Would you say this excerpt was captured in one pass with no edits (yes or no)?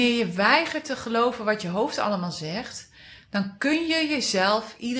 yes